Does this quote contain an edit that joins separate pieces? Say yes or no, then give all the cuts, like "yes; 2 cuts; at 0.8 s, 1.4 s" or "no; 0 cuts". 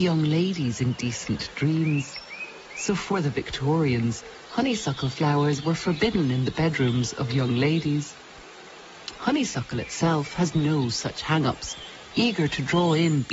no; 0 cuts